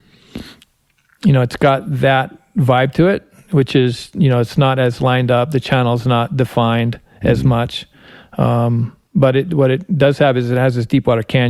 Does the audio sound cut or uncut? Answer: uncut